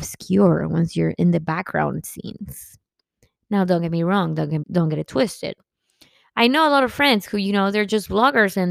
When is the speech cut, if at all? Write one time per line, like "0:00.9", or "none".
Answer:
0:04.6